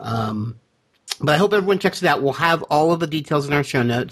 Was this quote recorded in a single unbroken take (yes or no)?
yes